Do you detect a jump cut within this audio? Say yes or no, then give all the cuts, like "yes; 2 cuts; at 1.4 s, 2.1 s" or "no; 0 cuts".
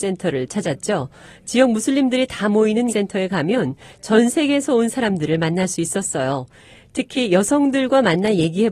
yes; 1 cut; at 2.9 s